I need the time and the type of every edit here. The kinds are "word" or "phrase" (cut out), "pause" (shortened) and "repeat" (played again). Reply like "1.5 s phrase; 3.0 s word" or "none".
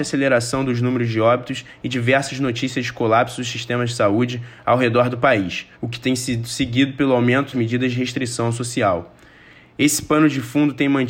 5.7 s pause; 7.5 s word